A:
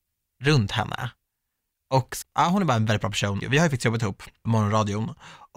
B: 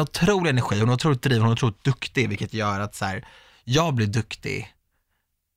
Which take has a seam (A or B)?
A